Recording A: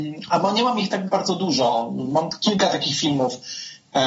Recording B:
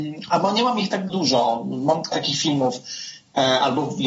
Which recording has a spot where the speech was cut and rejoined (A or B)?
B